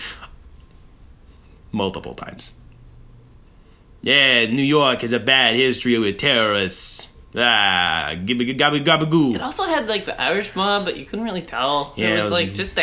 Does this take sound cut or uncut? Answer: uncut